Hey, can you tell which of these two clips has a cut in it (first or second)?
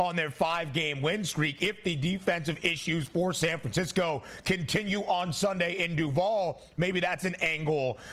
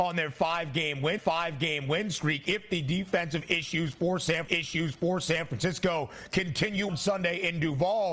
second